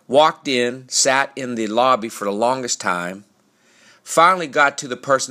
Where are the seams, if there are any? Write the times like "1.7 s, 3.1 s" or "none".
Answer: none

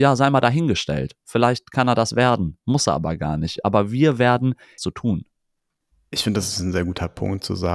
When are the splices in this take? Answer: 4.8 s

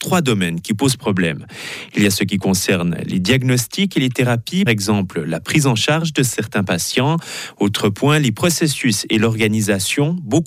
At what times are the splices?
4.7 s

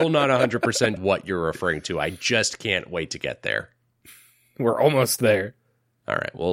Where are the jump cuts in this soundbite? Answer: 1.0 s

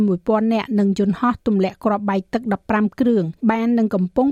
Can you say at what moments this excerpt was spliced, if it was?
3.4 s

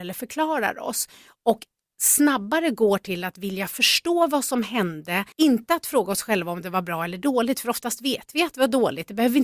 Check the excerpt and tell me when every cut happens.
5.3 s

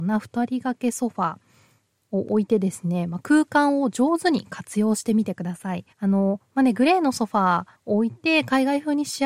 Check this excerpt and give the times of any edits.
5.9 s, 7.8 s

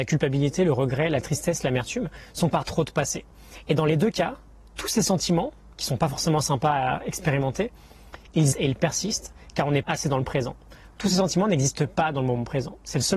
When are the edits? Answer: 2.5 s, 8.5 s, 9.8 s

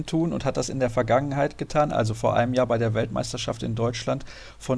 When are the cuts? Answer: none

